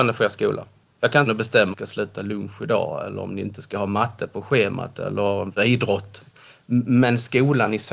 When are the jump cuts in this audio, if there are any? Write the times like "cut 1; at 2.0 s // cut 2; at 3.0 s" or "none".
cut 1; at 1.3 s // cut 2; at 1.7 s // cut 3; at 5.6 s

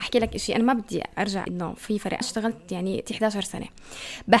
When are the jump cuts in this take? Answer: cut 1; at 1.5 s // cut 2; at 2.2 s // cut 3; at 3.1 s

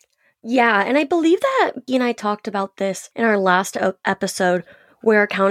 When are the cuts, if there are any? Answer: cut 1; at 1.9 s // cut 2; at 3.1 s

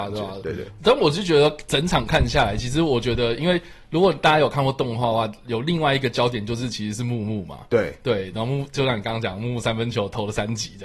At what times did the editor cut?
none

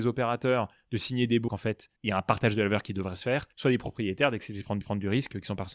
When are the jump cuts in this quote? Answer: cut 1; at 1.5 s // cut 2; at 2.0 s // cut 3; at 3.5 s // cut 4; at 4.8 s

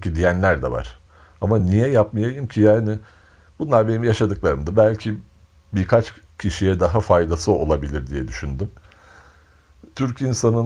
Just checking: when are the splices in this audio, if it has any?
none

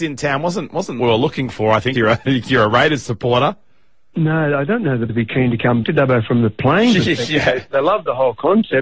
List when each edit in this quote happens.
cut 1; at 1.0 s // cut 2; at 1.9 s // cut 3; at 5.1 s // cut 4; at 5.8 s

